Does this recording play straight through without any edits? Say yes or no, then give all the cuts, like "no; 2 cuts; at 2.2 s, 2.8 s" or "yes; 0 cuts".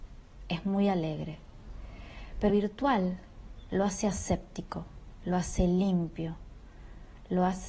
no; 1 cut; at 2.5 s